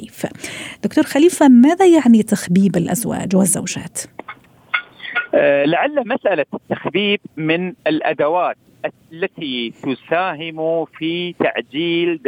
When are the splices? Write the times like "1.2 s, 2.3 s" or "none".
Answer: 7.8 s